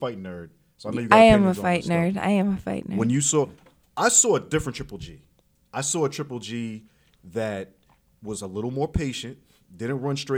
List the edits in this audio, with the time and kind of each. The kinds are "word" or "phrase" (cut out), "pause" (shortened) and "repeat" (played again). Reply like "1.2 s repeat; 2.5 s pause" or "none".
none